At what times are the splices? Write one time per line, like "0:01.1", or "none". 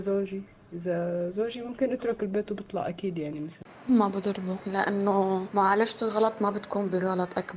none